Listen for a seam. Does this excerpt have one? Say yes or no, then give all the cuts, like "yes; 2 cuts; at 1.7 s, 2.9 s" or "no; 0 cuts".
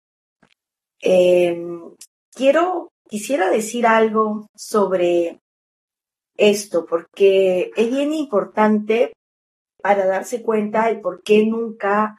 no; 0 cuts